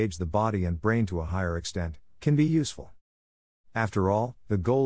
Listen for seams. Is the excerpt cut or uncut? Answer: uncut